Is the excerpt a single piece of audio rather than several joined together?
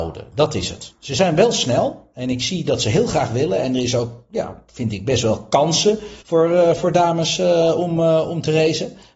no; 1 cut; at 6.2 s

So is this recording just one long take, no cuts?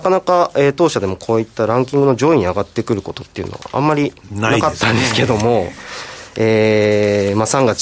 yes; 0 cuts

